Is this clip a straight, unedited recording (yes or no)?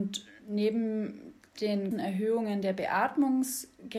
no